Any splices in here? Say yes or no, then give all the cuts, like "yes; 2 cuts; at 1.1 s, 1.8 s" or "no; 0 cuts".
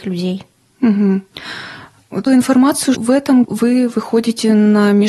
yes; 3 cuts; at 2.3 s, 2.9 s, 3.4 s